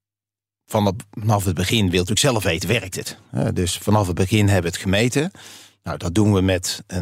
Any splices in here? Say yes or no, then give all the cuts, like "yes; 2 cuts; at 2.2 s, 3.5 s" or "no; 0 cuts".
no; 0 cuts